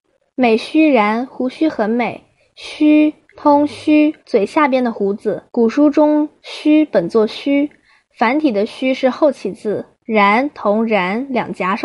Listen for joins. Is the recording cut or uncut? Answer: cut